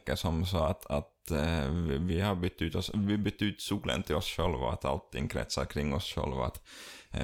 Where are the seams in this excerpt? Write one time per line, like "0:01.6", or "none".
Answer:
none